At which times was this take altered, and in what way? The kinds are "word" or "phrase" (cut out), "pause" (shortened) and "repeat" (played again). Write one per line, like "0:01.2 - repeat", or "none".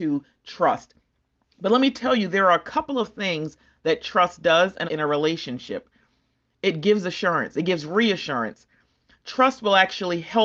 0:04.9 - word